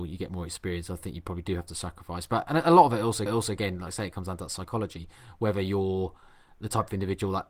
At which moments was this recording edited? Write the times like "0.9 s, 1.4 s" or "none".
3.3 s

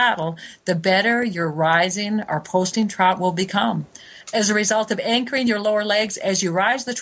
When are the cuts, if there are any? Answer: 4.2 s

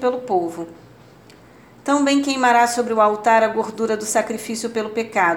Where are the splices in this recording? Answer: none

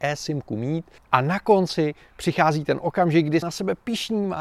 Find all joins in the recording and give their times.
1.0 s, 3.4 s

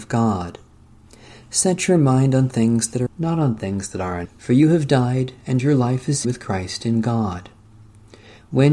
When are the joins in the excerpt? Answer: 3.1 s, 4.2 s, 6.2 s

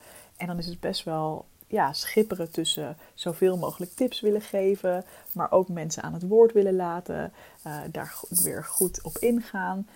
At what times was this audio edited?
1.5 s

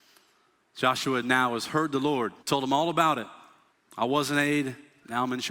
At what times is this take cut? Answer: 2.4 s, 3.7 s

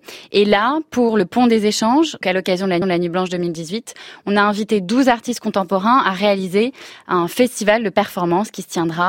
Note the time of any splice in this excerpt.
2.2 s, 2.8 s

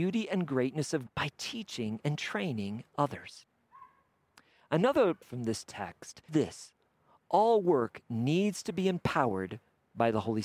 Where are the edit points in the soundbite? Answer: 1.1 s, 5.2 s, 6.3 s

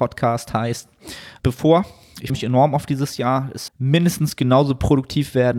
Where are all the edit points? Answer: 1.4 s, 2.3 s, 3.7 s

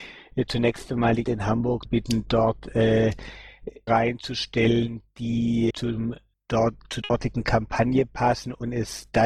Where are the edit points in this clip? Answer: 1.2 s, 1.8 s, 3.9 s, 5.7 s, 7.0 s

